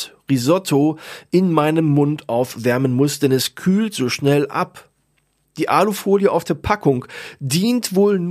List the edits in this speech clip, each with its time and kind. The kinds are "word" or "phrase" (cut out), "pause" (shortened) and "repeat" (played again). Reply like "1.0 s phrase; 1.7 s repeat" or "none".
none